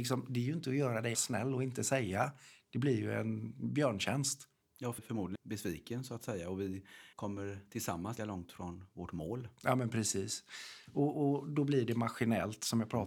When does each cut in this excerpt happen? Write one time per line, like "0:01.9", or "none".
0:01.1
0:04.6
0:05.0
0:05.4
0:07.1
0:08.2